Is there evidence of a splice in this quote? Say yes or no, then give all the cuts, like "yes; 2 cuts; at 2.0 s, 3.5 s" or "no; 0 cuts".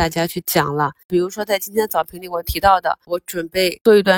yes; 1 cut; at 3.1 s